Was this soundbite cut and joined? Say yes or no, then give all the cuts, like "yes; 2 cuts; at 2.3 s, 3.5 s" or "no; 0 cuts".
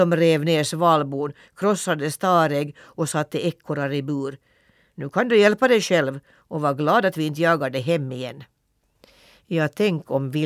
no; 0 cuts